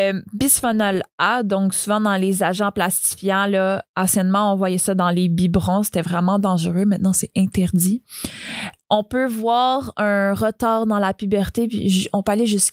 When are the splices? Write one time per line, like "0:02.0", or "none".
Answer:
none